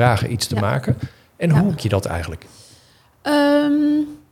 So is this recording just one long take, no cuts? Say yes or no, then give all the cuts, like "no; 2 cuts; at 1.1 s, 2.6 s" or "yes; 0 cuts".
no; 1 cut; at 1.8 s